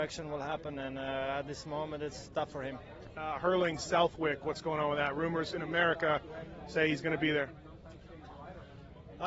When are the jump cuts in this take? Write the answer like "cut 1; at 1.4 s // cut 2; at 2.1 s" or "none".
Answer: none